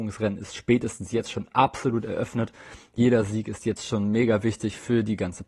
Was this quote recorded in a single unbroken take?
yes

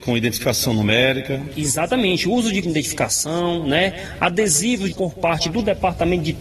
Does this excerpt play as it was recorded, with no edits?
no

